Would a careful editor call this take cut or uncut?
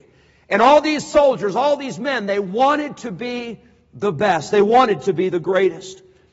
uncut